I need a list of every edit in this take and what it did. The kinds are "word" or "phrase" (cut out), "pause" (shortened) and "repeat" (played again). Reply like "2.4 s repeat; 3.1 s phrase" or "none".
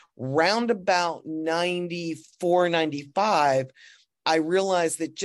none